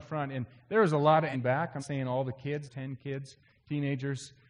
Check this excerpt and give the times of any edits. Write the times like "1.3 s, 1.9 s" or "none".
1.3 s, 1.8 s, 2.7 s